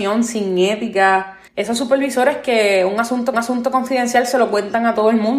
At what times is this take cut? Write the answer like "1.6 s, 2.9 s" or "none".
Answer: 1.5 s, 3.3 s